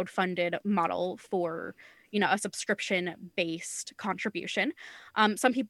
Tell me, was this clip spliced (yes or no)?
no